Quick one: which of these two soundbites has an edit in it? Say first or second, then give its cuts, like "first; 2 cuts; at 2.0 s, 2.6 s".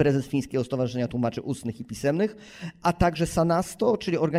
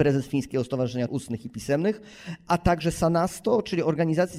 second; 1 cut; at 1.1 s